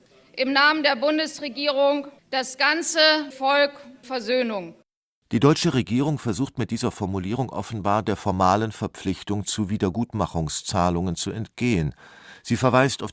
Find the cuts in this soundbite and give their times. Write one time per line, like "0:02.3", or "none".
0:02.2
0:03.3
0:04.0